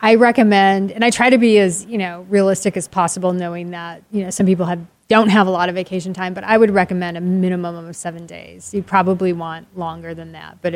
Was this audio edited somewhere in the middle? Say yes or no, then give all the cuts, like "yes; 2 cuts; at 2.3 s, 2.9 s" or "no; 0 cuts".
no; 0 cuts